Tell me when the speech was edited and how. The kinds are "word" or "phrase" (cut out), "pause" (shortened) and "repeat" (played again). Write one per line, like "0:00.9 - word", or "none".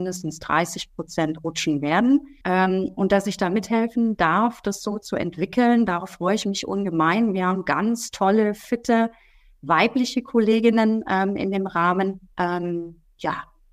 0:02.4 - pause
0:12.3 - pause